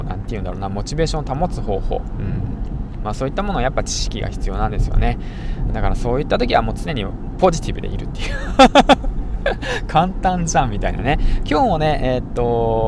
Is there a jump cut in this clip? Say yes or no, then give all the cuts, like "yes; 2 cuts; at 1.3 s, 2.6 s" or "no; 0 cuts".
yes; 1 cut; at 5.7 s